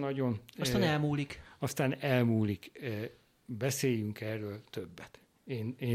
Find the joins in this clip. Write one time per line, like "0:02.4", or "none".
none